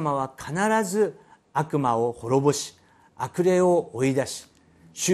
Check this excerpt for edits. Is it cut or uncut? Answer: uncut